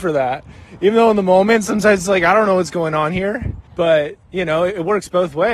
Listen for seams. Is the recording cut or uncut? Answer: cut